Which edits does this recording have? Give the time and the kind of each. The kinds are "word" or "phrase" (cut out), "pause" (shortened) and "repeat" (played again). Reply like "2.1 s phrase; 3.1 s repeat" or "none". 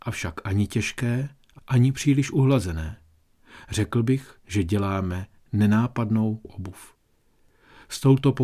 1.6 s word; 4.4 s pause; 6.4 s word